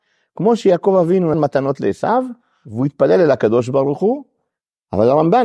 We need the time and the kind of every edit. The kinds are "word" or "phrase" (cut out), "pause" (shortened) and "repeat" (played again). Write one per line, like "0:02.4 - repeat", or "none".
0:01.3 - word